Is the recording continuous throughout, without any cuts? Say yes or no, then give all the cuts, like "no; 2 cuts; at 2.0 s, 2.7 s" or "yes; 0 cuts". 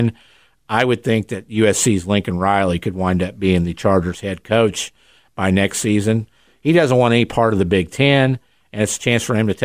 yes; 0 cuts